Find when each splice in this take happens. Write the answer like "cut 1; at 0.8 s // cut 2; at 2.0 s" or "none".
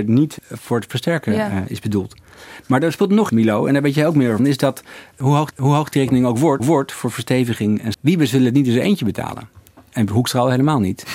cut 1; at 3.3 s // cut 2; at 4.4 s // cut 3; at 5.5 s // cut 4; at 6.6 s // cut 5; at 7.9 s